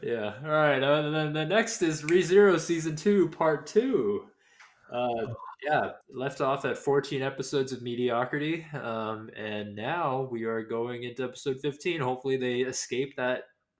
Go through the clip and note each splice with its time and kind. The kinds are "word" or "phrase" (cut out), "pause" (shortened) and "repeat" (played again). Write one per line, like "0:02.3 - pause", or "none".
0:06.0 - pause